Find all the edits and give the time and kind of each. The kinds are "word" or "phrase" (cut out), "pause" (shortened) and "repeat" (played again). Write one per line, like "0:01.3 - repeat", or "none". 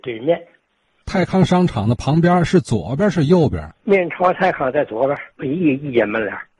0:03.7 - pause
0:05.3 - pause